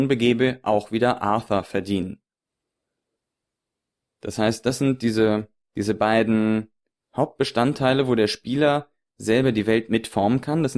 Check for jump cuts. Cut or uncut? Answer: uncut